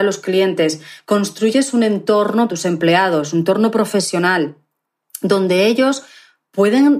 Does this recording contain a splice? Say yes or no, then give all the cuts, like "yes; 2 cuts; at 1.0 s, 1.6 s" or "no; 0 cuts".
yes; 1 cut; at 2.5 s